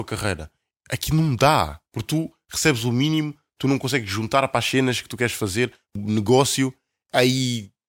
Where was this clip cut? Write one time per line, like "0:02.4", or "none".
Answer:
0:01.9
0:06.0